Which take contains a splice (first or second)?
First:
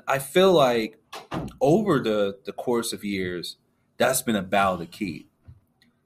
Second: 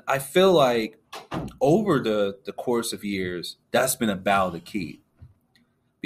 second